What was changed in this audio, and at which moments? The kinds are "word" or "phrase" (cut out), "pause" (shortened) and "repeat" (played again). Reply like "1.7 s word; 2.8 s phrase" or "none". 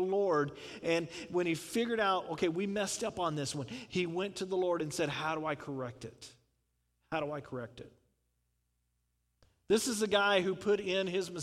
none